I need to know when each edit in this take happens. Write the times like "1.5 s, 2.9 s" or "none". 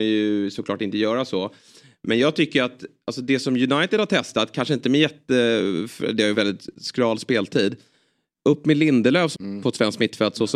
6.3 s, 6.7 s, 9.3 s